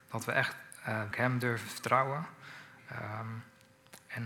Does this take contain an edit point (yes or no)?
yes